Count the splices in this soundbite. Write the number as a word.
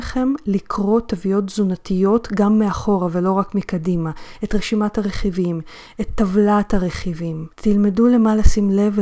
one